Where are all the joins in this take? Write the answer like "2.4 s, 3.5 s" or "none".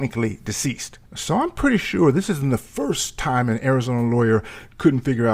1.1 s

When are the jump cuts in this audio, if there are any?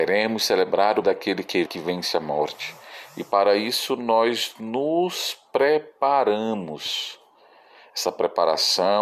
1.0 s, 1.7 s

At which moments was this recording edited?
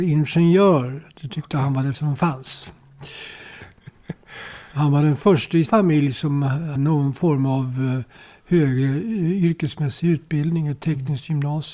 1.9 s, 5.7 s, 6.8 s

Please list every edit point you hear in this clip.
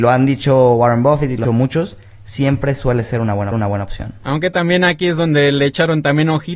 1.4 s, 3.5 s

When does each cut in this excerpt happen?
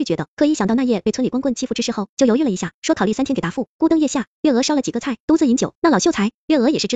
5.8 s

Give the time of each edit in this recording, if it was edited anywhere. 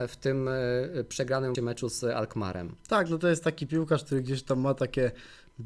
1.5 s

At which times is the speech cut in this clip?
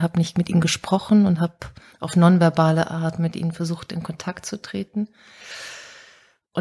1.9 s

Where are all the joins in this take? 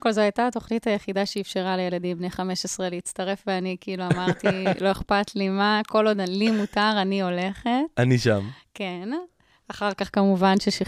none

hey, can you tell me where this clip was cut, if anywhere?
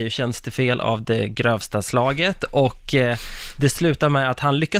none

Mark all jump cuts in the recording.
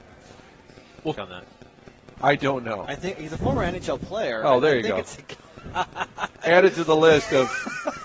1.1 s

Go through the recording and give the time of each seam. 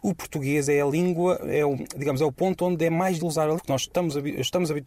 3.2 s, 3.6 s

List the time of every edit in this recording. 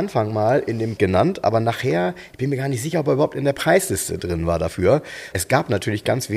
1.0 s, 5.3 s

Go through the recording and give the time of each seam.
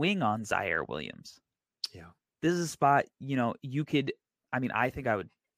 2.2 s, 4.4 s

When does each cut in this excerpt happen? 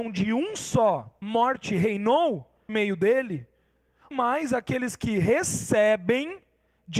1.2 s, 2.7 s, 4.1 s

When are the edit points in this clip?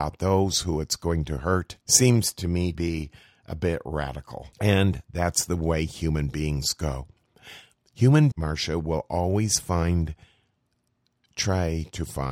1.8 s, 2.7 s, 4.5 s, 8.3 s

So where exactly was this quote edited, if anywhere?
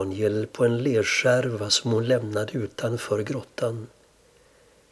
none

